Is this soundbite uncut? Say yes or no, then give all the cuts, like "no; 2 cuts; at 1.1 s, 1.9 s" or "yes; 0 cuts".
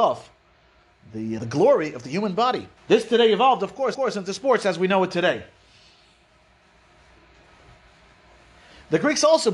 no; 3 cuts; at 1.4 s, 2.8 s, 3.9 s